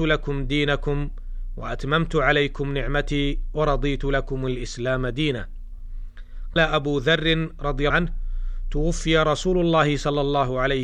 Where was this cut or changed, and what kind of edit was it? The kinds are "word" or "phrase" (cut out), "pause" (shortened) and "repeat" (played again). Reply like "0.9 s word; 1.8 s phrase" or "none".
6.6 s word; 7.9 s word